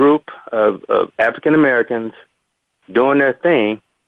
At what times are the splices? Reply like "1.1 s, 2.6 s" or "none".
none

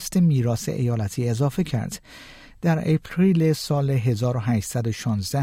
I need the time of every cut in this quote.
none

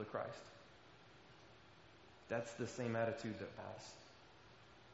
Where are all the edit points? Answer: 3.6 s

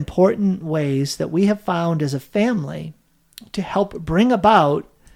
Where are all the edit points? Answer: none

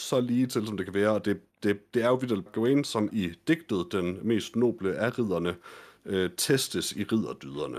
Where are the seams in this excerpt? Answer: 1.5 s, 2.5 s, 3.1 s

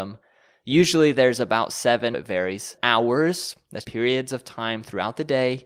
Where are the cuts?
2.1 s, 2.8 s, 3.8 s

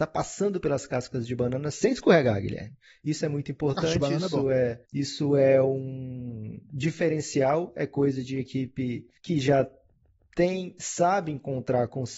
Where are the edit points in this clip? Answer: 4.9 s, 9.2 s

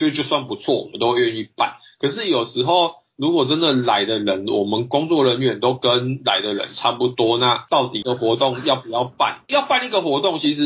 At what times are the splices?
none

